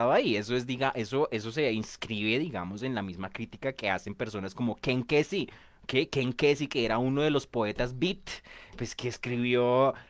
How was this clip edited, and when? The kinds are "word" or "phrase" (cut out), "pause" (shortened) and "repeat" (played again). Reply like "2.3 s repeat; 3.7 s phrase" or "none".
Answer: none